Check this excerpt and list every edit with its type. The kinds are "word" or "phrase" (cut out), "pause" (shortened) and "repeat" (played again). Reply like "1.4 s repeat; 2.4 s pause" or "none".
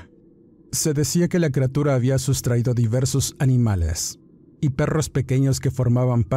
none